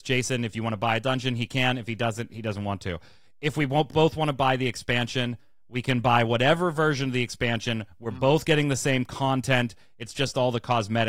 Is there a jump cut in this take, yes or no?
no